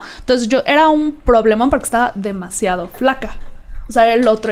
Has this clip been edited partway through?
no; 0 cuts

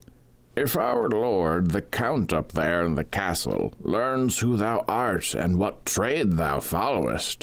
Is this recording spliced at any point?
no; 0 cuts

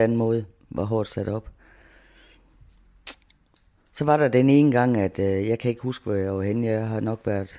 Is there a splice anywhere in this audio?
no; 0 cuts

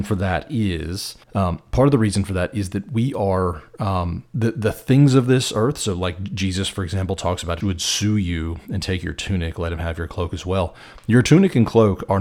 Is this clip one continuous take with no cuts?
no; 2 cuts; at 1.2 s, 7.6 s

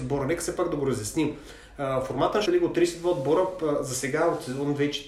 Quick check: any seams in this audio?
yes; 1 cut; at 2.5 s

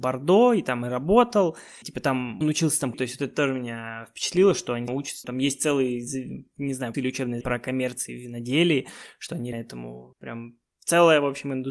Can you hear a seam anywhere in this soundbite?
yes; 9 cuts; at 1.8 s, 2.4 s, 2.9 s, 4.9 s, 5.2 s, 6.9 s, 7.4 s, 9.5 s, 10.1 s

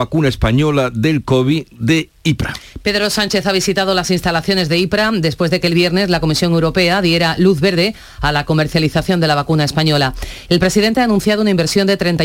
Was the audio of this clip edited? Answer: no; 0 cuts

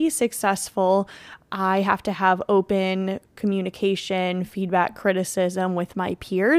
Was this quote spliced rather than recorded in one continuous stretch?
no; 0 cuts

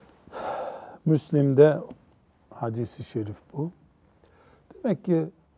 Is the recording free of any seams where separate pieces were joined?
yes; 0 cuts

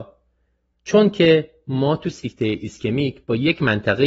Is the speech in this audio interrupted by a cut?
no; 0 cuts

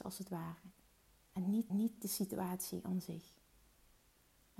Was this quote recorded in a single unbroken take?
no; 1 cut; at 1.7 s

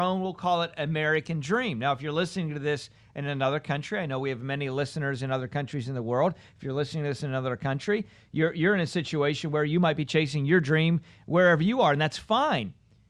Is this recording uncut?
yes; 0 cuts

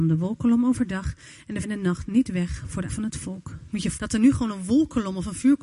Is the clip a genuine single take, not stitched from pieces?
no; 3 cuts; at 1.6 s, 2.9 s, 4.0 s

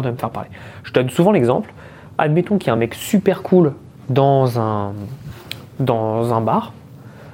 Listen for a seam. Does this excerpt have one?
no; 0 cuts

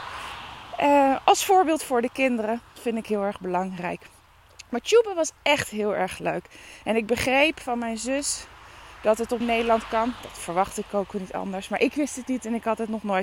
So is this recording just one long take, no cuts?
no; 2 cuts; at 5.4 s, 9.4 s

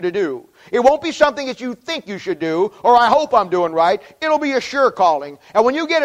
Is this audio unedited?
yes; 0 cuts

